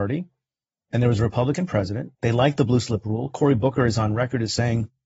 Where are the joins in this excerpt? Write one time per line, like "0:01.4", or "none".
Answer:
0:02.1